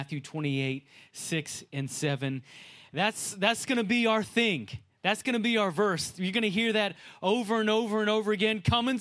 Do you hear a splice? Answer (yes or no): no